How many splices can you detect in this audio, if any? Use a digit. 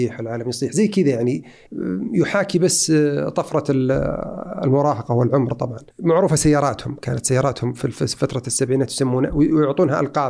1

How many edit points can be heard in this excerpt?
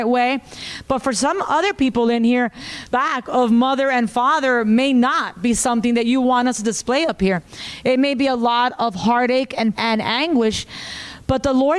2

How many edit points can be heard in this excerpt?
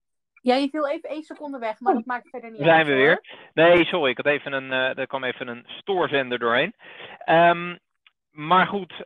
0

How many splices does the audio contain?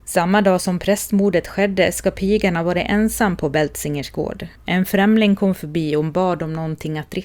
1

